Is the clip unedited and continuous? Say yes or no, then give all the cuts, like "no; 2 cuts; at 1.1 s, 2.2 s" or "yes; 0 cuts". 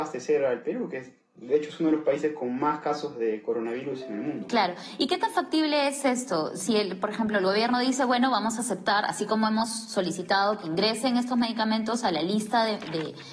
yes; 0 cuts